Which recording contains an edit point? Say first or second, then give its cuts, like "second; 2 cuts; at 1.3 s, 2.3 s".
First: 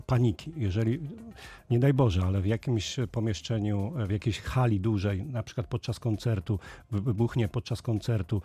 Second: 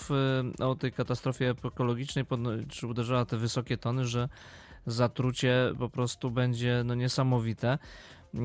first; 1 cut; at 7.5 s